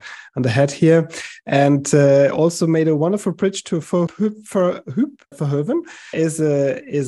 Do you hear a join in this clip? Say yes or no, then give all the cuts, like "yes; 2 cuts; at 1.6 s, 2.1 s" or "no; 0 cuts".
yes; 3 cuts; at 4.1 s, 5.3 s, 6.1 s